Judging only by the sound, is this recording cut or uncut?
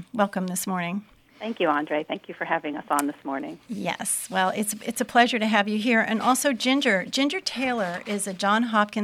uncut